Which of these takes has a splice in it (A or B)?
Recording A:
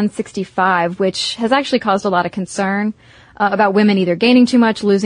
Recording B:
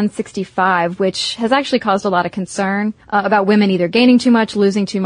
B